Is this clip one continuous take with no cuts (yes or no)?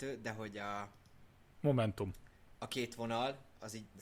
yes